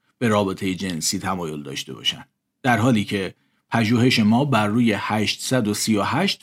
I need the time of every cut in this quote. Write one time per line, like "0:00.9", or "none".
none